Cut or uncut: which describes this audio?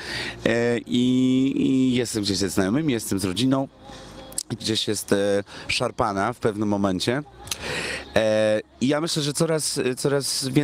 cut